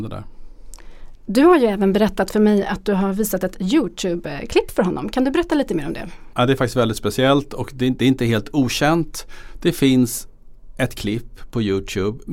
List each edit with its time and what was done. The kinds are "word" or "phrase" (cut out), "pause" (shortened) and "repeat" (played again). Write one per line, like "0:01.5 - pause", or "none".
none